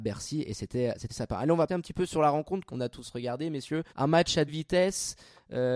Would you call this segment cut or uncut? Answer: cut